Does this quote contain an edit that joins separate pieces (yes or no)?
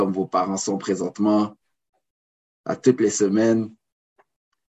no